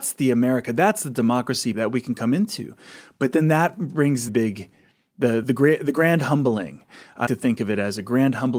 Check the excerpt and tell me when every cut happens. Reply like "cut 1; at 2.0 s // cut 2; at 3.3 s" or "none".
cut 1; at 1.7 s // cut 2; at 4.3 s // cut 3; at 5.4 s // cut 4; at 7.3 s